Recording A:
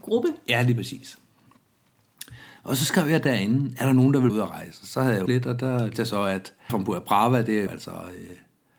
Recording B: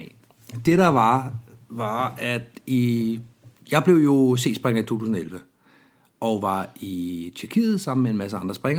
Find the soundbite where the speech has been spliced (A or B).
A